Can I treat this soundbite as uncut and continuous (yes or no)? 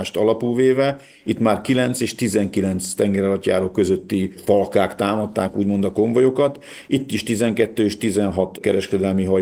yes